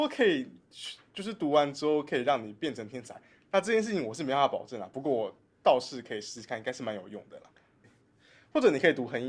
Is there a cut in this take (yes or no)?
no